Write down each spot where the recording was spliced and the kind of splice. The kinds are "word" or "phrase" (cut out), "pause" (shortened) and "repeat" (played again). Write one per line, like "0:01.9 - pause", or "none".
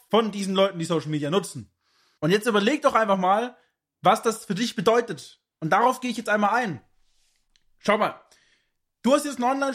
none